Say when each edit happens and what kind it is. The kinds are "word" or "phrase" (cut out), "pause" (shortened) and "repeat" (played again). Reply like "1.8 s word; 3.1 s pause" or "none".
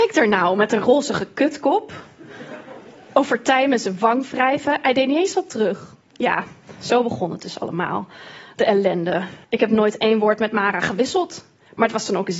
6.0 s pause; 9.4 s pause